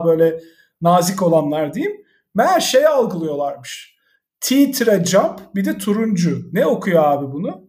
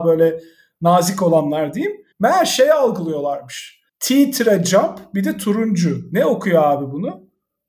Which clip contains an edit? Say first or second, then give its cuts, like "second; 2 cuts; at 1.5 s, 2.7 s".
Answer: second; 2 cuts; at 2.1 s, 3.9 s